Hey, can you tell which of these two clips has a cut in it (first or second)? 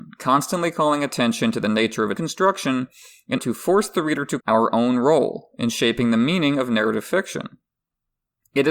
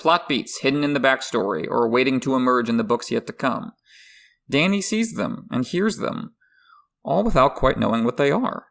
first